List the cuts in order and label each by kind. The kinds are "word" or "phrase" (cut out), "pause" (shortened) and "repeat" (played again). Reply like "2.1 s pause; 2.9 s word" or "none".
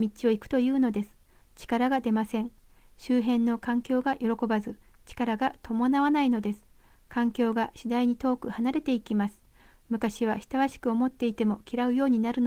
none